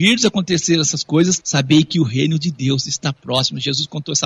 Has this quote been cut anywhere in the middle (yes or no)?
no